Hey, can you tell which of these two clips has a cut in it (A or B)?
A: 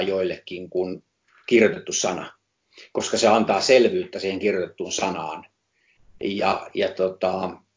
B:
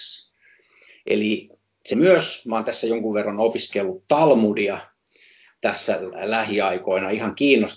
B